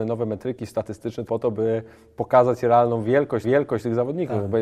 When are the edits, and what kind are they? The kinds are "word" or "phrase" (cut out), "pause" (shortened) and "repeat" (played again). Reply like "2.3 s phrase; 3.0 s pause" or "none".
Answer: 1.3 s word; 3.4 s repeat